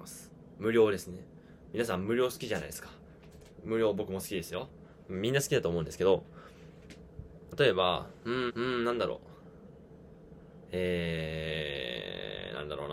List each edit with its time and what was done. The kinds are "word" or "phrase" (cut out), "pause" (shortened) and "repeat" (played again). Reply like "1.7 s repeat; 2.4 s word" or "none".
7.5 s phrase; 8.5 s repeat